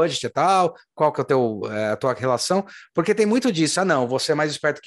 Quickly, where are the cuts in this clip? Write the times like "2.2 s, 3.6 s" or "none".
none